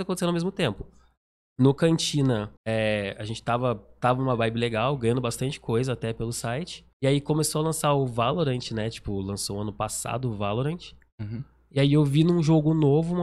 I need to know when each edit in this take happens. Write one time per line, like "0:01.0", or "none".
0:02.6
0:06.9